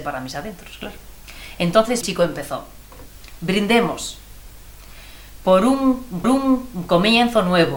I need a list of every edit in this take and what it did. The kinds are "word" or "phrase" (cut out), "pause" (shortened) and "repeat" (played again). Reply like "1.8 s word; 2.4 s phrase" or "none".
2.0 s word; 6.2 s repeat